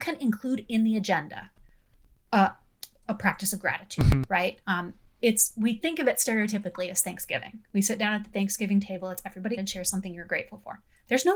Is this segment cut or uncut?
cut